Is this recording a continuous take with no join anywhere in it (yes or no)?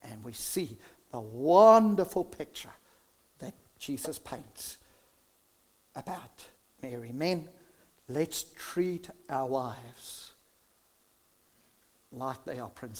yes